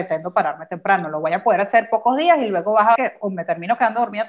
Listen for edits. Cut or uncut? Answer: cut